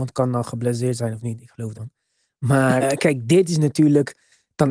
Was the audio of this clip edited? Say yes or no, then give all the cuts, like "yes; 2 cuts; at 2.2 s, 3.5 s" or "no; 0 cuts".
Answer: yes; 2 cuts; at 1.7 s, 2.8 s